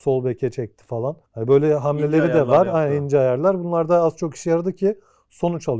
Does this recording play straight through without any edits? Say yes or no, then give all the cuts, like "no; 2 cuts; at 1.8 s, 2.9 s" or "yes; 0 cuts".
no; 1 cut; at 1.2 s